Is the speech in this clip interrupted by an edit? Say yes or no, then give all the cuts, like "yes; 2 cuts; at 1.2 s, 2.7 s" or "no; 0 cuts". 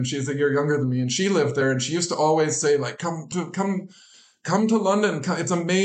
yes; 1 cut; at 3.3 s